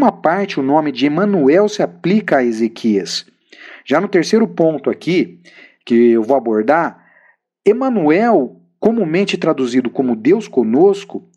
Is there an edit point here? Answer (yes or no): no